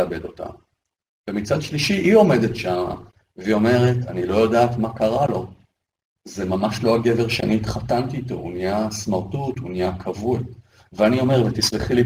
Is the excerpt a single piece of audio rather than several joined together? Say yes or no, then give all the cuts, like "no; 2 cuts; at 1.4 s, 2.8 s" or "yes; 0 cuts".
yes; 0 cuts